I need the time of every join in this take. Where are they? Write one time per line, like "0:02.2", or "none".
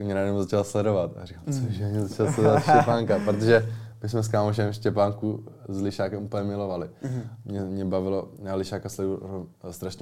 none